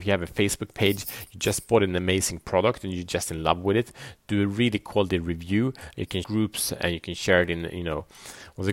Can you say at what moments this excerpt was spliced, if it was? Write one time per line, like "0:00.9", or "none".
0:06.2